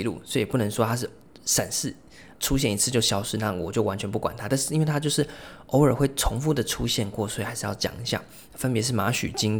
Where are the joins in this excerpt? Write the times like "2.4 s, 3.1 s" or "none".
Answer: 2.3 s